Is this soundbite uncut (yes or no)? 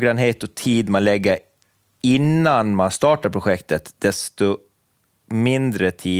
yes